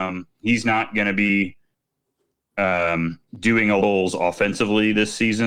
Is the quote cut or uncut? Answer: cut